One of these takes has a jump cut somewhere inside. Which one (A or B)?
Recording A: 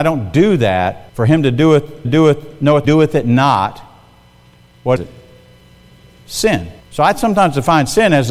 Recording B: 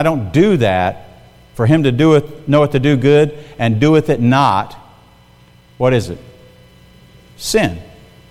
A